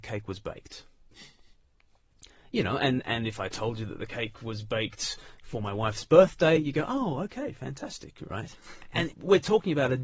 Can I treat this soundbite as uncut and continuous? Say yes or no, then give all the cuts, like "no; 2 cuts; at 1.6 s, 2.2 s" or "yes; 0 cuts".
yes; 0 cuts